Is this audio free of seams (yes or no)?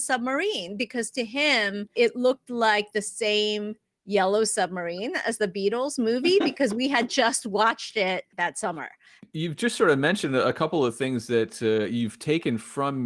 yes